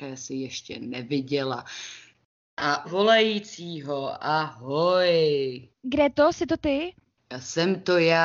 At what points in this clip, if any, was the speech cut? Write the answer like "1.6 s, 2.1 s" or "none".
2.8 s, 5.7 s